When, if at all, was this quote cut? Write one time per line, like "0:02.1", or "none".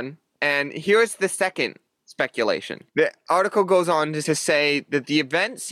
0:02.9
0:04.2